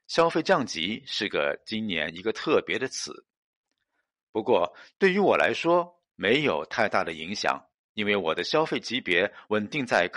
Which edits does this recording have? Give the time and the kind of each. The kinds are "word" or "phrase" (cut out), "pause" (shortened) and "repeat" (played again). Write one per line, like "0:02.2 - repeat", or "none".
none